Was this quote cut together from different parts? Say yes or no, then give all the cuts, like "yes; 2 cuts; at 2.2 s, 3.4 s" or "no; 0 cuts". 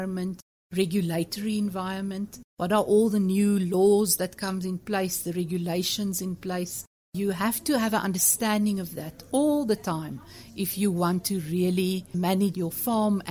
yes; 1 cut; at 2.5 s